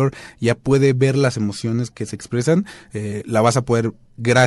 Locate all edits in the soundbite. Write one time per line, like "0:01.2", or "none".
0:01.9